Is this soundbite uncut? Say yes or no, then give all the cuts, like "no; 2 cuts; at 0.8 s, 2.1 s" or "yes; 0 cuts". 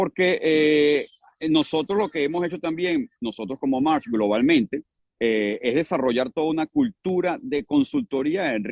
yes; 0 cuts